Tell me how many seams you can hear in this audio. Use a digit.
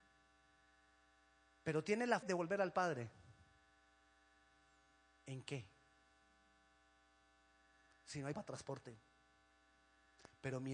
2